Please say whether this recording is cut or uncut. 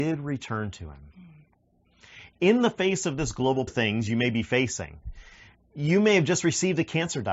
cut